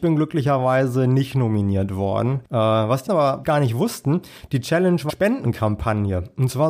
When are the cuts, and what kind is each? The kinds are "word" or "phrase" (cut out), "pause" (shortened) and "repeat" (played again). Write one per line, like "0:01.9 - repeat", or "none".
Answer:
0:02.4 - pause
0:03.1 - word
0:03.4 - word
0:05.1 - word